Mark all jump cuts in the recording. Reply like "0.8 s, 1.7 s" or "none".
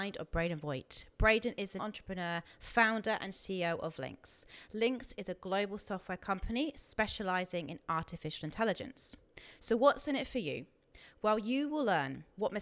1.8 s